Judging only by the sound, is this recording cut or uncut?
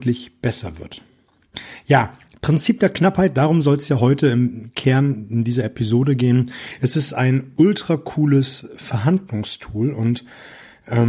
uncut